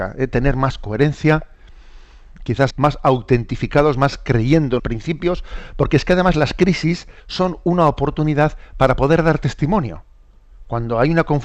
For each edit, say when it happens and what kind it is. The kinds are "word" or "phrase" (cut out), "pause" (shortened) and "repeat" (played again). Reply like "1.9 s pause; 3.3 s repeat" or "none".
2.7 s phrase; 4.8 s word; 7.2 s pause

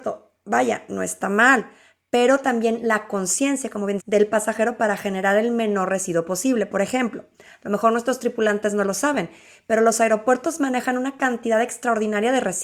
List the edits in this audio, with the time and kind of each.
4.0 s phrase

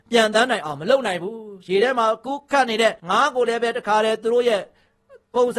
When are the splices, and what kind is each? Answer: 3.0 s pause

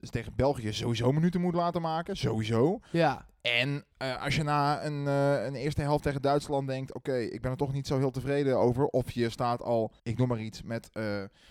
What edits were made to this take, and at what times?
3.9 s pause; 10.0 s pause

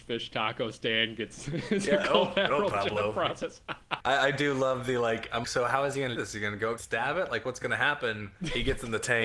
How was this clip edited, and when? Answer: 2.7 s phrase; 4.0 s phrase; 5.4 s word; 6.2 s phrase; 6.8 s phrase

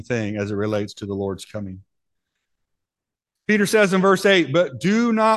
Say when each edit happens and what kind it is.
none

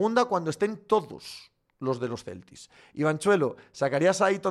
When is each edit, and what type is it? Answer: none

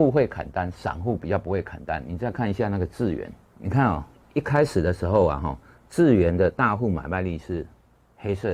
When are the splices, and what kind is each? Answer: none

